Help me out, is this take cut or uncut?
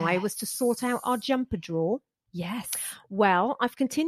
uncut